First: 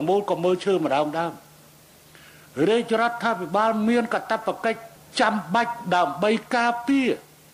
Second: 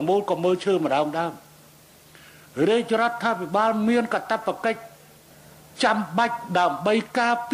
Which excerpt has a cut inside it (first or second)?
first